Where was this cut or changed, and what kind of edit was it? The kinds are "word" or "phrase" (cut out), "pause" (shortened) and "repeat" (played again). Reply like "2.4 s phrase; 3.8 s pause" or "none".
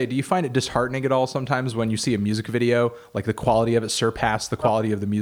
none